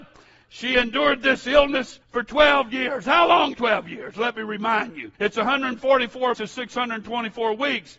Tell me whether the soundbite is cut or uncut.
cut